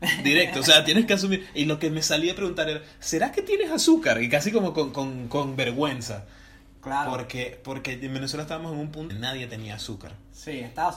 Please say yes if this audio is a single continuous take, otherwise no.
no